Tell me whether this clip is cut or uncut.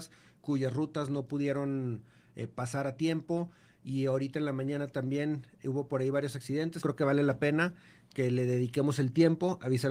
cut